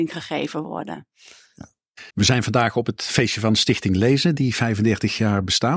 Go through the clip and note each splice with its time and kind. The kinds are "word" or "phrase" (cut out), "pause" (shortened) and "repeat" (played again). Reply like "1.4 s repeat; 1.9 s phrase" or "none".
2.1 s pause

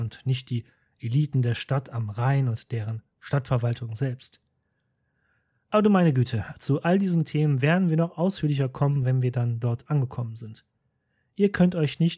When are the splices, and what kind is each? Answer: none

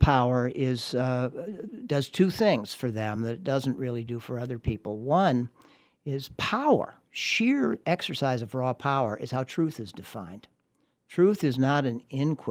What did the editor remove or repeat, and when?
none

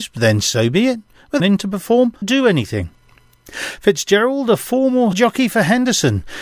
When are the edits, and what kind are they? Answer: 1.4 s phrase; 2.2 s word; 5.1 s word

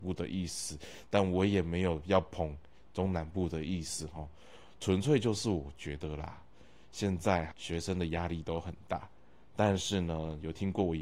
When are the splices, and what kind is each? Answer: 7.5 s word

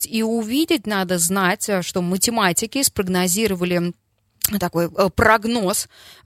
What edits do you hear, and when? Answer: none

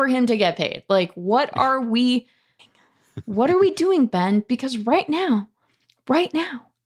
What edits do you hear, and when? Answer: 2.6 s pause

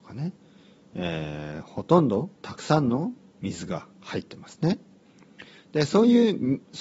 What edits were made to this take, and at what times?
2.4 s pause; 3.3 s pause; 3.9 s pause

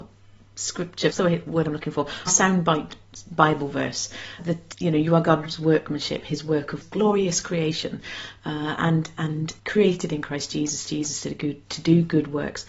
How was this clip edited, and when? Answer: 1.1 s phrase; 2.3 s word; 4.4 s word; 4.7 s word; 6.8 s phrase; 9.6 s pause; 10.9 s repeat

